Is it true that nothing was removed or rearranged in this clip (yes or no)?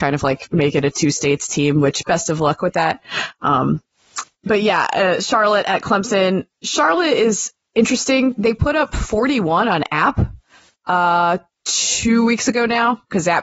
yes